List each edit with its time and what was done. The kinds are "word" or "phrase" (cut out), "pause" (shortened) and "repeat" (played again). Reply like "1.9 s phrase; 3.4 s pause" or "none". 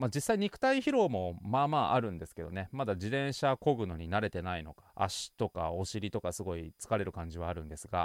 4.9 s pause

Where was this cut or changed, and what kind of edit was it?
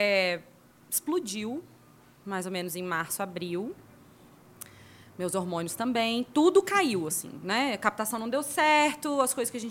none

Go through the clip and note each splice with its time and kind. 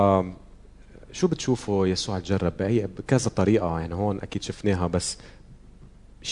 none

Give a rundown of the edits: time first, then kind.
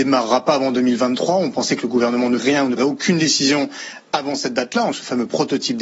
2.4 s word; 2.8 s word; 4.9 s word

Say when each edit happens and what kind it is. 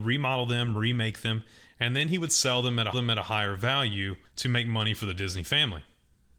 2.9 s repeat; 4.3 s pause

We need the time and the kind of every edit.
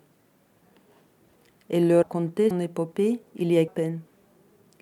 2.0 s word; 2.5 s word; 3.3 s pause; 3.7 s phrase

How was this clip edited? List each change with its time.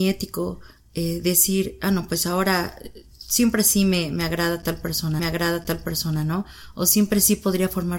5.2 s repeat

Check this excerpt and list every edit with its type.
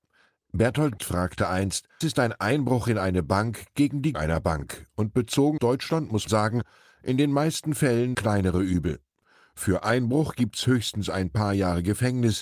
1.0 s word; 2.0 s word; 4.1 s word; 5.6 s word; 6.3 s word; 8.1 s word

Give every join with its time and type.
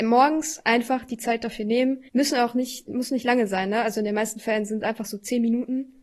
2.1 s pause

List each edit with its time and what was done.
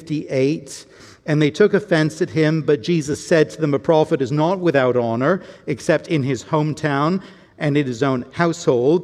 none

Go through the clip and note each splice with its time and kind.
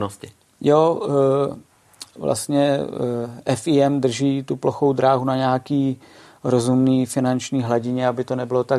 none

